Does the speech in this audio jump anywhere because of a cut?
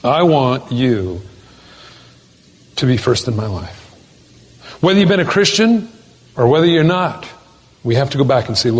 no; 0 cuts

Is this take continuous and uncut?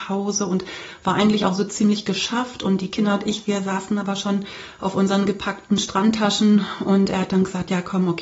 yes; 0 cuts

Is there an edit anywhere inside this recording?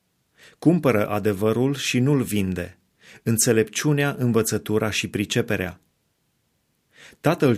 no; 0 cuts

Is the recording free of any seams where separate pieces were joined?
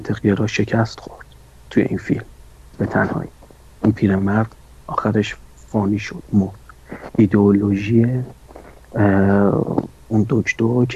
yes; 0 cuts

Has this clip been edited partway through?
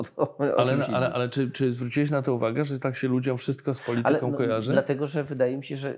no; 0 cuts

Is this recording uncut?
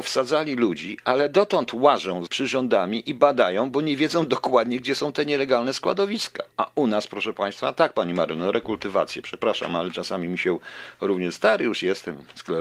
no; 2 cuts; at 2.3 s, 6.5 s

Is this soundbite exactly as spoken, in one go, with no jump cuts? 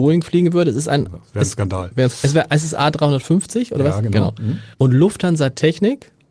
no; 1 cut; at 4.7 s

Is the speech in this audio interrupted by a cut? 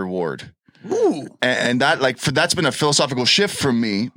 no; 0 cuts

